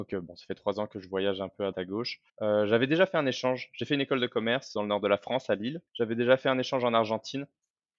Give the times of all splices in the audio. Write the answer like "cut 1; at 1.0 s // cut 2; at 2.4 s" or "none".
cut 1; at 1.7 s // cut 2; at 2.3 s // cut 3; at 4.8 s // cut 4; at 5.9 s